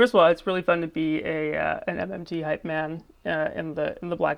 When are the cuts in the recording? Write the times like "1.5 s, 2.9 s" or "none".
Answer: none

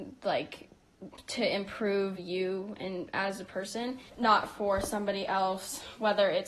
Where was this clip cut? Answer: 4.1 s

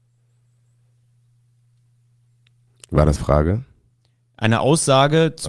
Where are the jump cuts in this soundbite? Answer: 3.2 s

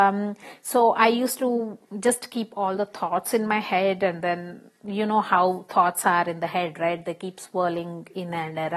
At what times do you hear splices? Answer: none

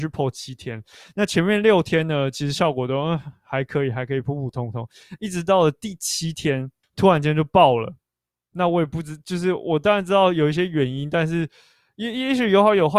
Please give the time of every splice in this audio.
6.8 s

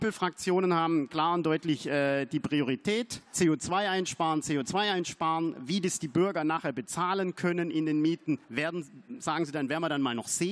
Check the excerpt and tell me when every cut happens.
3.3 s, 8.4 s

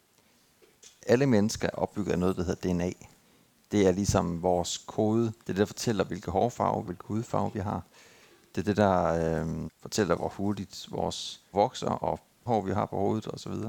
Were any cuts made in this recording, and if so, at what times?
1.7 s, 5.4 s, 6.9 s, 9.7 s, 10.2 s, 11.5 s, 12.5 s

